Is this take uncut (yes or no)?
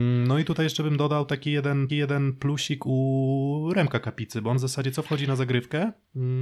no